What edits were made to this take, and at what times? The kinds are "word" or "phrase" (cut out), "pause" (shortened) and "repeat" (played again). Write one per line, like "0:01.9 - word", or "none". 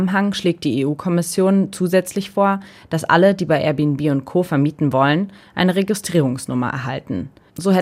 none